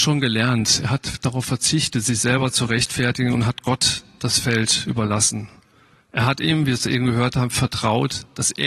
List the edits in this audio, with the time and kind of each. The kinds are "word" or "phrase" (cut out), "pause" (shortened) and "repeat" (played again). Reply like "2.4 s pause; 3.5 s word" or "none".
none